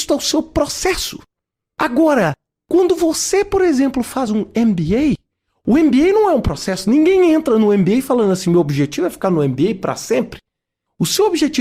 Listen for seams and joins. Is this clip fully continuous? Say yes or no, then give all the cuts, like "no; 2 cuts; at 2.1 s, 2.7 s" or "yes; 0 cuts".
yes; 0 cuts